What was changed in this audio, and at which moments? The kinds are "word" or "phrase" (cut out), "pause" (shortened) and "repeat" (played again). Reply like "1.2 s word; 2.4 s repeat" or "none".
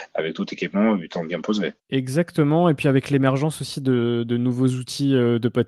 1.8 s pause

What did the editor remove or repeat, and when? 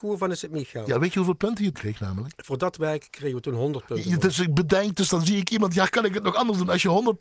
1.7 s word

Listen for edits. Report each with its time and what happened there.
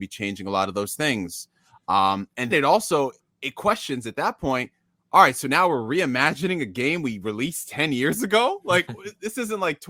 2.5 s word

